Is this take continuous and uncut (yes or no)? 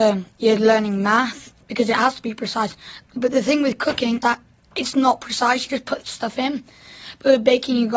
no